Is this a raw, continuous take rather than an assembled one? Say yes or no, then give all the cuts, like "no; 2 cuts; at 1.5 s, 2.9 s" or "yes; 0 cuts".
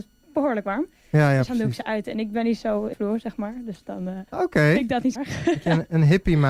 no; 3 cuts; at 2.9 s, 4.3 s, 5.2 s